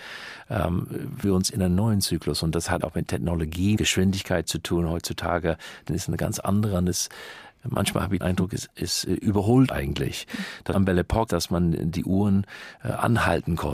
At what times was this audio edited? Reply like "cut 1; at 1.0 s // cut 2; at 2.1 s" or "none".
cut 1; at 1.2 s // cut 2; at 2.8 s // cut 3; at 3.8 s // cut 4; at 5.9 s // cut 5; at 8.2 s // cut 6; at 9.7 s // cut 7; at 10.7 s // cut 8; at 11.3 s